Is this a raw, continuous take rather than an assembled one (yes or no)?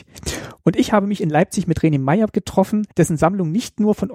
no